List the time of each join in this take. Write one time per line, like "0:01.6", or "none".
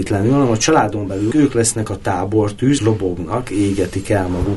0:01.3
0:02.8